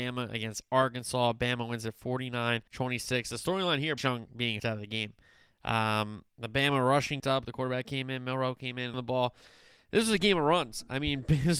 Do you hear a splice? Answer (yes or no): yes